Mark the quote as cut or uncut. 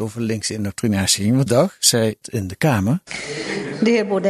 cut